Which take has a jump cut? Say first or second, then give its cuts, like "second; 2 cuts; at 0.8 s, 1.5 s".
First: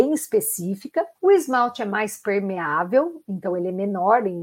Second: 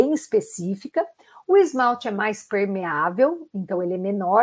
first; 1 cut; at 1.2 s